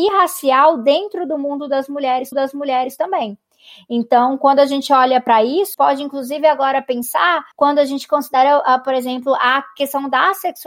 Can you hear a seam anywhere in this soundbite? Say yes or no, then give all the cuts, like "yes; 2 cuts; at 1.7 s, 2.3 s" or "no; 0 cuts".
yes; 3 cuts; at 2.3 s, 5.7 s, 7.5 s